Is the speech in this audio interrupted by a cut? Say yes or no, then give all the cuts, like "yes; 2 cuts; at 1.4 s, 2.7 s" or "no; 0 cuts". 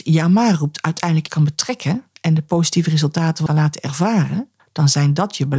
yes; 3 cuts; at 1.3 s, 3.5 s, 4.6 s